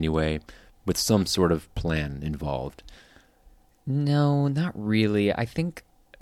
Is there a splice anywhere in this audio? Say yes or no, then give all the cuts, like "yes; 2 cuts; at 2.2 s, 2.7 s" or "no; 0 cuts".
no; 0 cuts